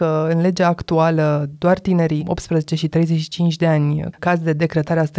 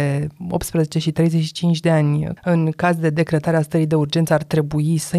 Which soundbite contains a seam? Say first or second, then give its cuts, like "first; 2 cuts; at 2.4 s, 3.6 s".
first; 2 cuts; at 2.2 s, 4.2 s